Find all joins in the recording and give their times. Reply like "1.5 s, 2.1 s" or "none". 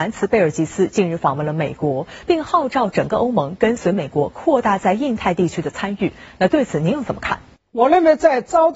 7.6 s